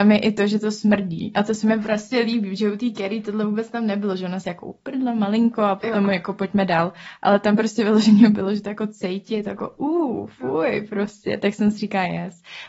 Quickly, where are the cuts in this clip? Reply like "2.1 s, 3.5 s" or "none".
none